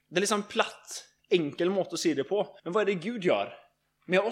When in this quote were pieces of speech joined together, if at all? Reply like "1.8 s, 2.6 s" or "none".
2.6 s